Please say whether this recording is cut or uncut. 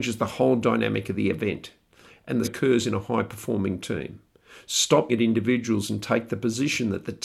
cut